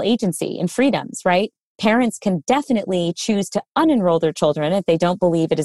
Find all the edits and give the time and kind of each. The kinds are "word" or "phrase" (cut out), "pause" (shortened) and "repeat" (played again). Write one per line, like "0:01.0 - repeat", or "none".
none